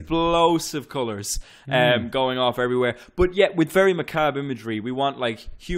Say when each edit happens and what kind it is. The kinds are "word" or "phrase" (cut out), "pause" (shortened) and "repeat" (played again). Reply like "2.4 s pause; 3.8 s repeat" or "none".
none